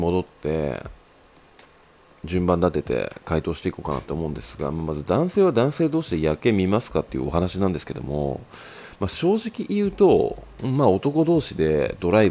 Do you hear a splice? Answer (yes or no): no